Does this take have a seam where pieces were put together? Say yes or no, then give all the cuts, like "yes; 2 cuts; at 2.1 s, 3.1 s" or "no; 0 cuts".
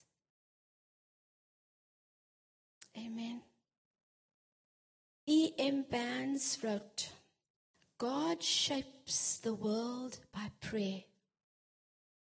no; 0 cuts